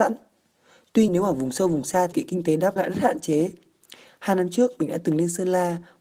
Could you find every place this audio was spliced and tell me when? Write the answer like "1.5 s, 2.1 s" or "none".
1.1 s, 2.1 s, 2.8 s